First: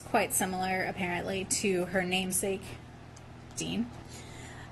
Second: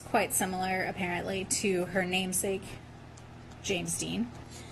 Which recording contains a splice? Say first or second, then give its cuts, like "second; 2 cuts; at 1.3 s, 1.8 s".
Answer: first; 1 cut; at 3.6 s